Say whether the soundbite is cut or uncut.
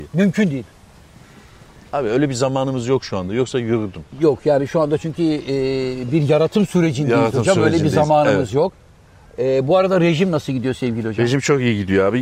uncut